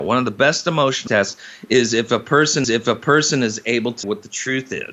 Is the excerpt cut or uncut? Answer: cut